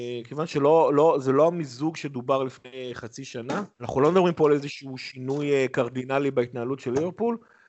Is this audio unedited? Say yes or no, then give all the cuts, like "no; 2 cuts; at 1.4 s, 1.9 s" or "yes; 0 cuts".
no; 1 cut; at 3.7 s